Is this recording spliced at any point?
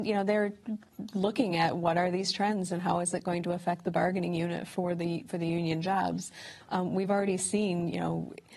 no; 0 cuts

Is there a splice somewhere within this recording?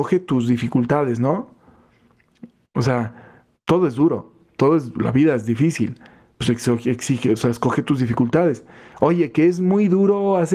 no; 0 cuts

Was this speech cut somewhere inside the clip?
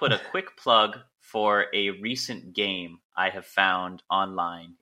no; 0 cuts

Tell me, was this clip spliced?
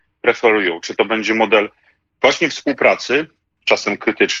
no; 0 cuts

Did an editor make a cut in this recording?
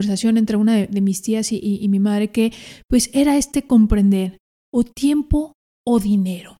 no; 0 cuts

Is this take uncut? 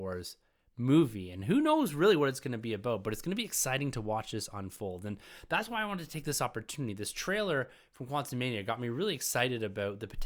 yes; 0 cuts

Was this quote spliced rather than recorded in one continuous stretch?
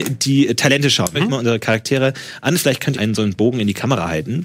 yes; 2 cuts; at 1.1 s, 2.9 s

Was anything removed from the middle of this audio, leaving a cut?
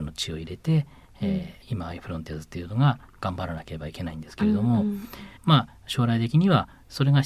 yes; 2 cuts; at 1.6 s, 5.4 s

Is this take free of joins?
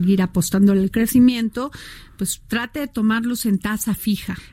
yes; 0 cuts

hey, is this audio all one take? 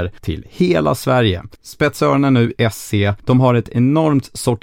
no; 1 cut; at 2.6 s

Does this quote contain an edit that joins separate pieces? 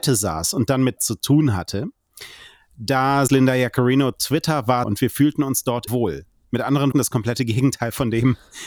yes; 5 cuts; at 1.0 s, 3.3 s, 4.8 s, 5.9 s, 6.9 s

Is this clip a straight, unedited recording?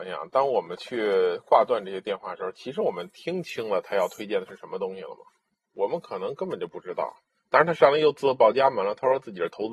yes; 0 cuts

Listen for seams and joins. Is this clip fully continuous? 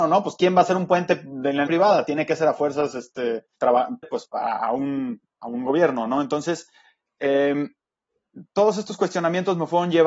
no; 3 cuts; at 1.7 s, 3.6 s, 4.0 s

